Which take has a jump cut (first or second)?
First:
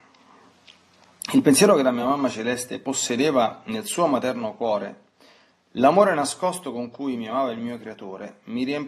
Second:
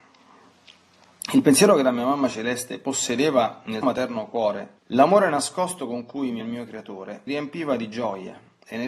second